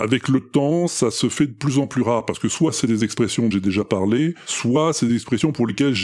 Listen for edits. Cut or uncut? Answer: cut